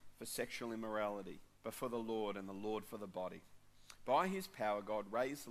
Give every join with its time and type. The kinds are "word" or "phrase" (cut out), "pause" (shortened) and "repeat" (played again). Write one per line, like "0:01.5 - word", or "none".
0:01.5 - pause